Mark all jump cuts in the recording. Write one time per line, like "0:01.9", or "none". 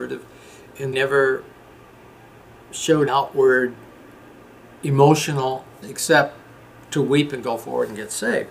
0:00.9
0:03.1
0:05.8

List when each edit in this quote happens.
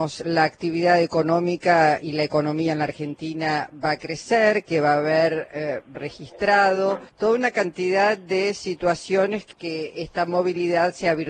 0:05.9
0:07.1
0:09.5

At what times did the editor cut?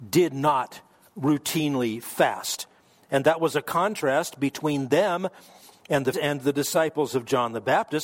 0:06.1

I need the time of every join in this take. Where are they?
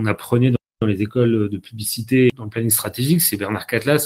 0:02.3

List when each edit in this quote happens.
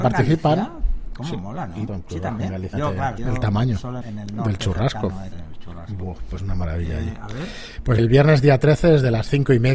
0:01.9
0:02.7
0:03.2
0:04.0
0:05.3
0:06.4
0:08.0

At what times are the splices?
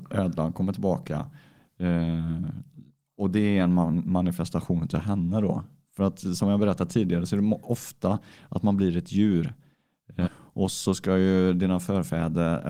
0:10.3

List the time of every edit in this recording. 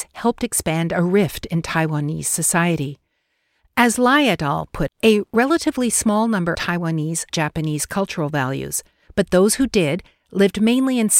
0:04.9
0:06.5
0:07.3

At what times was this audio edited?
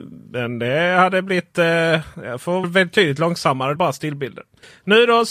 0:02.1
0:02.6
0:03.8

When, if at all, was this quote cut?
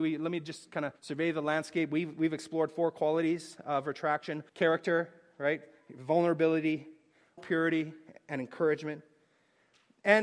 0:01.0
0:04.5
0:07.4

